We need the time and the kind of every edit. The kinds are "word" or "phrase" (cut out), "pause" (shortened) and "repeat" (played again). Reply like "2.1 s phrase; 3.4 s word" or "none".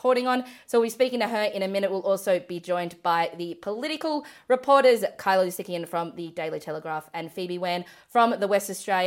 none